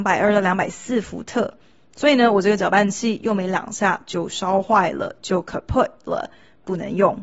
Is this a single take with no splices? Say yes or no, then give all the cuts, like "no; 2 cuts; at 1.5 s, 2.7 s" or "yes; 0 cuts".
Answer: yes; 0 cuts